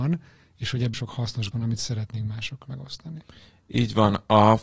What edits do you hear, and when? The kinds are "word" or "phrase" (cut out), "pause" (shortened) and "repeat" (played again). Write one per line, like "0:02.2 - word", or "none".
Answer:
0:00.9 - word
0:01.5 - word
0:02.6 - word